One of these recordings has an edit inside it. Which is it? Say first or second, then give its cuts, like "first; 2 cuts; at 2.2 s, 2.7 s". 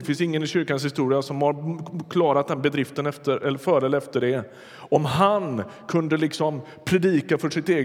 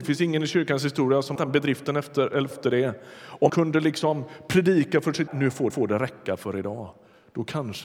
second; 5 cuts; at 1.3 s, 2.5 s, 3.5 s, 5.3 s, 5.7 s